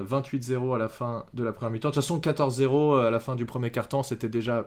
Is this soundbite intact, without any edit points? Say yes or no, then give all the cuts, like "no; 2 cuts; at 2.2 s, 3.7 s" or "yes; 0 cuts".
yes; 0 cuts